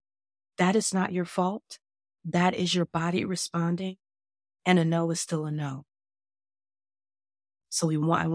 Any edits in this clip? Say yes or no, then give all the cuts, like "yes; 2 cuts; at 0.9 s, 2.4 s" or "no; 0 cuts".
no; 0 cuts